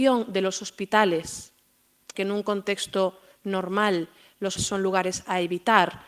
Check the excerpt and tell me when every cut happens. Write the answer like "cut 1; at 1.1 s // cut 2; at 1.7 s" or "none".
cut 1; at 2.1 s // cut 2; at 4.6 s